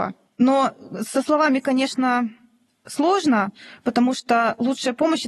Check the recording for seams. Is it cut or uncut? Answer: uncut